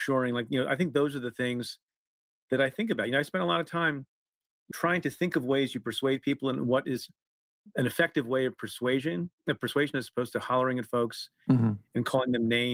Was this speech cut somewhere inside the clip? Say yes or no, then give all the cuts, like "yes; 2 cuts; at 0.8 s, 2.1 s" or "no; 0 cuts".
yes; 2 cuts; at 4.7 s, 7.7 s